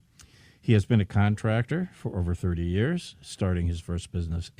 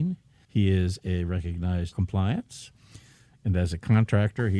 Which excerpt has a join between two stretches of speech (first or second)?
second